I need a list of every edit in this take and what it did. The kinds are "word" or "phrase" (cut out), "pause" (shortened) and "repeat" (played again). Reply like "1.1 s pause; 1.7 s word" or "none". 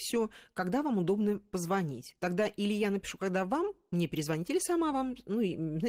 none